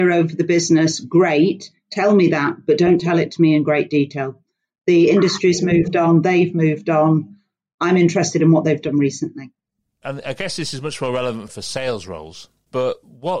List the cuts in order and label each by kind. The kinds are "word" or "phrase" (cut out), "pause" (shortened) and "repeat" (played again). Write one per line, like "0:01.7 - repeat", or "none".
none